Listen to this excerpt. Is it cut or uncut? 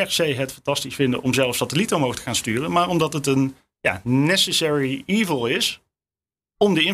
uncut